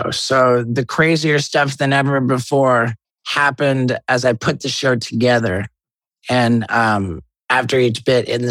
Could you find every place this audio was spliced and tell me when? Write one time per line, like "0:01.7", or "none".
none